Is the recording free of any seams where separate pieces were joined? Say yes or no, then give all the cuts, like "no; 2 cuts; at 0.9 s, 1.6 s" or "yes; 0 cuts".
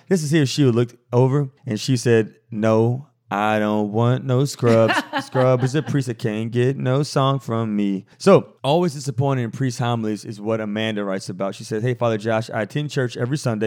no; 2 cuts; at 1.6 s, 8.1 s